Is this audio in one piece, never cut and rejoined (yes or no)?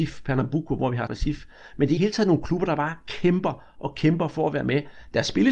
no